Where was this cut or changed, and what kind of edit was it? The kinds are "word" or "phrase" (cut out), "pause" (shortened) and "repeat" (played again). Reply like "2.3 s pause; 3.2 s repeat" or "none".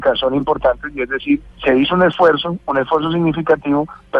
1.5 s pause